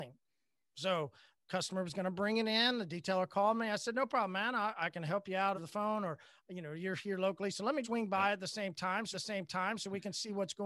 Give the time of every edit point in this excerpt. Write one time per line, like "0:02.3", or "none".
0:05.5
0:07.8
0:09.1

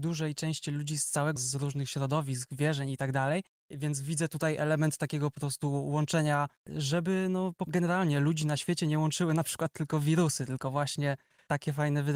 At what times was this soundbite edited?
0:01.4
0:06.6
0:07.7

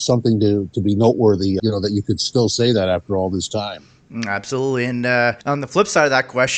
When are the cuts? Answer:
0:01.6
0:05.4

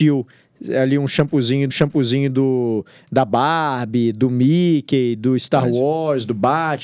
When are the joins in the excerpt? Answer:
0:01.7

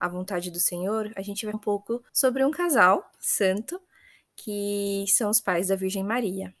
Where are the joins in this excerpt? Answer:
0:01.5
0:02.1
0:03.1

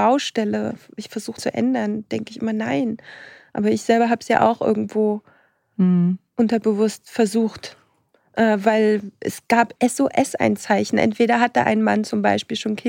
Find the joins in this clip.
0:01.4
0:09.8

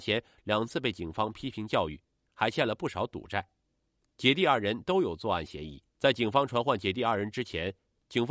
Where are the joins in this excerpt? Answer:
0:05.9

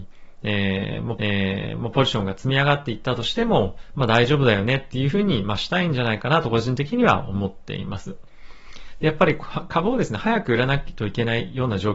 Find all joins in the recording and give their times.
0:01.2

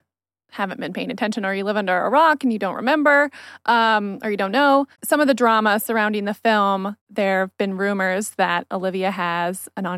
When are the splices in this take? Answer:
0:04.9
0:07.0

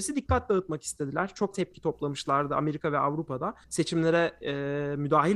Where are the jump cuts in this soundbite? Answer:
0:01.5
0:03.6

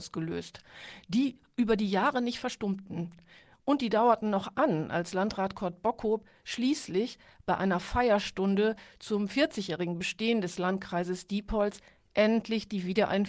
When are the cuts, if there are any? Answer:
none

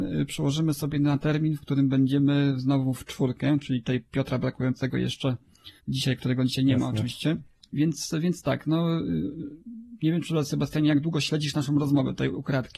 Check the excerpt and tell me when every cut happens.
0:05.8
0:07.6

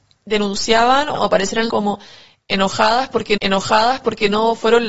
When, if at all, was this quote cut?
0:01.1
0:01.7
0:03.4

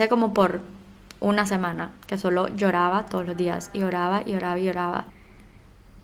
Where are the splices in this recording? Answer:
none

